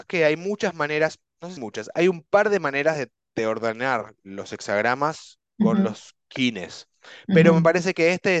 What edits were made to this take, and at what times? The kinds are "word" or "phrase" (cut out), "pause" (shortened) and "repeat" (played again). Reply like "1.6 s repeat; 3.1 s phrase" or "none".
1.6 s phrase